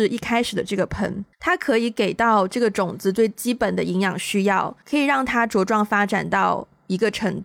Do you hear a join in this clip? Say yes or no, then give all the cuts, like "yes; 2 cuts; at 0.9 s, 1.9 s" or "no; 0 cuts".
yes; 2 cuts; at 1.3 s, 4.8 s